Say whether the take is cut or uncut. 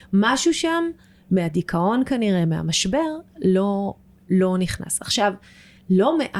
uncut